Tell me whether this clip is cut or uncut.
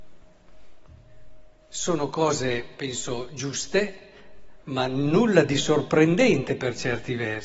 uncut